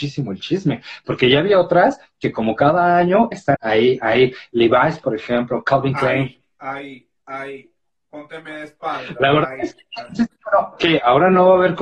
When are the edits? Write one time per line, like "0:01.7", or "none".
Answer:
0:03.5